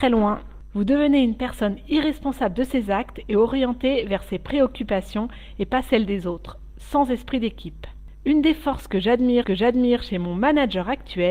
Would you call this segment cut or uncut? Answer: cut